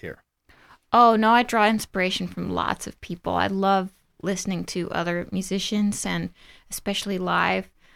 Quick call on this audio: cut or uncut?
uncut